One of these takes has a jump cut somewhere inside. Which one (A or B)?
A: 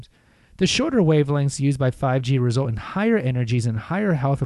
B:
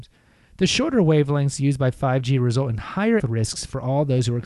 B